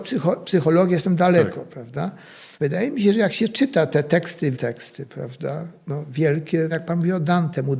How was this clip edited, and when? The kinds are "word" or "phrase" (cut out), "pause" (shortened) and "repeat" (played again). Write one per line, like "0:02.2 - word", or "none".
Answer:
0:02.5 - pause
0:04.5 - word
0:06.7 - phrase